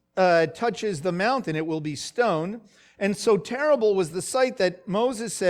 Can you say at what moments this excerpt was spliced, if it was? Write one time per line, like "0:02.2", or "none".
none